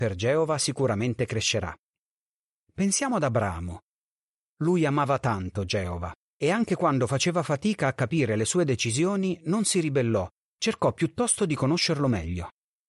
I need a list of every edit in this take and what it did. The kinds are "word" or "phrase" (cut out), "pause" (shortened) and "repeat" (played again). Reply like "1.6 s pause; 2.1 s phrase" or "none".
none